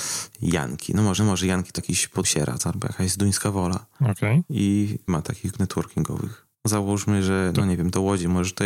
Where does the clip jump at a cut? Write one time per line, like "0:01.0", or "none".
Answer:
0:01.2
0:01.8
0:02.2
0:05.1
0:05.5
0:06.5